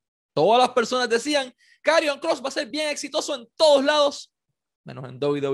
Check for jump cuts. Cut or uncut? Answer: uncut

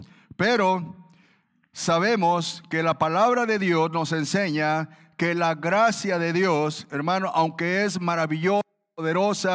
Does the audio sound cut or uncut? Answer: uncut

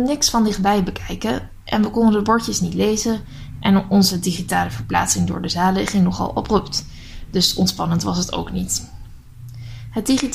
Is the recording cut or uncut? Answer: uncut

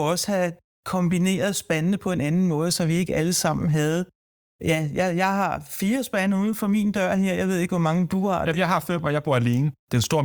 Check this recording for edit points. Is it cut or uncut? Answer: uncut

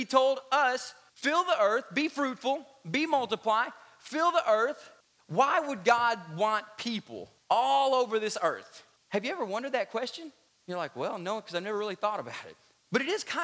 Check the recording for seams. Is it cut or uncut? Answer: uncut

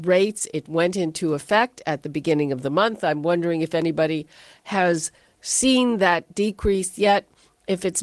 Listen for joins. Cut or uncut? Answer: uncut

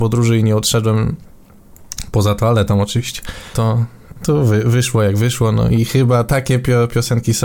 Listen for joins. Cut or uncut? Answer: cut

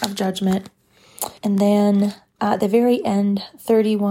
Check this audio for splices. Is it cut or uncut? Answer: cut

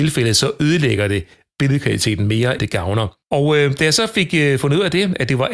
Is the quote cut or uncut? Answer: cut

